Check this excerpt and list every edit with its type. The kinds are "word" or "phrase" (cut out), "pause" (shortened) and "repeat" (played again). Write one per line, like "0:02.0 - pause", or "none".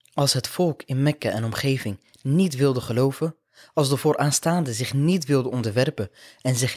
none